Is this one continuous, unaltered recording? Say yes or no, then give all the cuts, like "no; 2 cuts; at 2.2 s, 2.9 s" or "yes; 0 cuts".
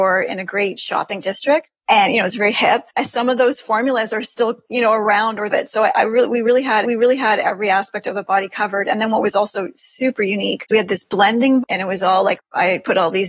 no; 5 cuts; at 2.9 s, 5.5 s, 6.8 s, 10.7 s, 11.6 s